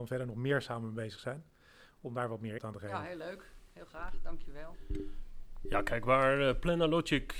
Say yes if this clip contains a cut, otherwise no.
yes